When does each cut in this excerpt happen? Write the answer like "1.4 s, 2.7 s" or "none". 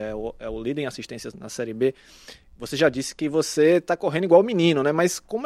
1.3 s